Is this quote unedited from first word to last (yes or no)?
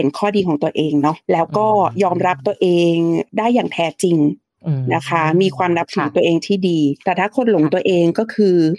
no